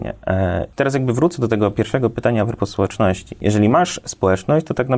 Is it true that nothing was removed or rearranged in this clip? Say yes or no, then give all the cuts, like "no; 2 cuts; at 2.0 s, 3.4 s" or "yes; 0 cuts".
yes; 0 cuts